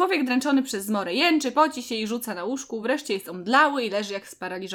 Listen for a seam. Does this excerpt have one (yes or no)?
no